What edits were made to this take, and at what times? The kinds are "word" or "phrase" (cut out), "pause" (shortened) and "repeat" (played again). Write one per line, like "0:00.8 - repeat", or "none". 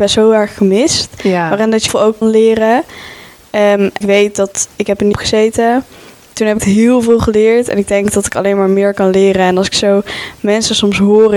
0:01.9 - word
0:02.2 - word
0:04.0 - word
0:05.1 - word
0:06.6 - word